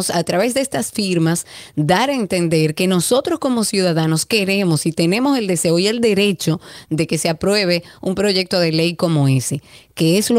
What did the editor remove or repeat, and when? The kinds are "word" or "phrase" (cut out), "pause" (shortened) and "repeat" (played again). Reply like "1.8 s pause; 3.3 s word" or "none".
none

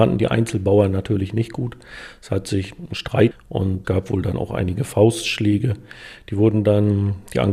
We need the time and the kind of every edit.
3.3 s phrase; 3.8 s word

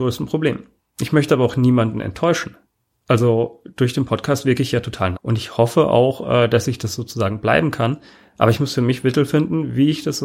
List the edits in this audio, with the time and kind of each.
5.1 s word

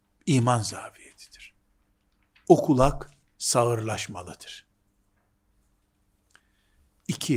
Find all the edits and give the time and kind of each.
none

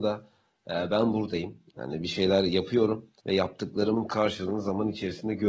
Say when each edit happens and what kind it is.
3.2 s pause

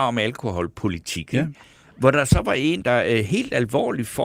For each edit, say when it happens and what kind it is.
2.8 s word

